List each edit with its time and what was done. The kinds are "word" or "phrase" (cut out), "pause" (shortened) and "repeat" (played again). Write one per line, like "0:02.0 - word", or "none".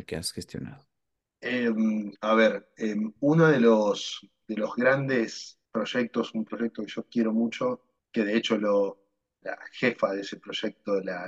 0:02.2 - pause
0:05.6 - pause
0:08.0 - word
0:09.4 - word